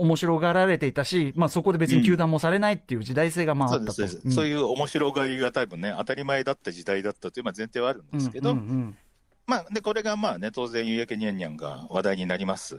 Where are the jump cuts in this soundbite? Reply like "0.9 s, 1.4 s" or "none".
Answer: none